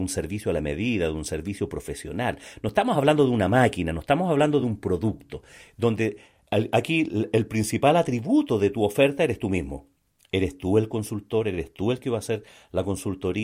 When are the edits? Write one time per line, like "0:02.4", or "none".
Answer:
none